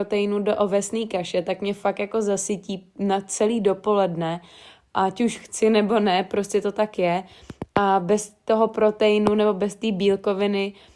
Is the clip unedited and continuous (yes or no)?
yes